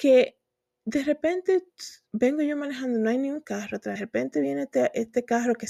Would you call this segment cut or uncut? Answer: cut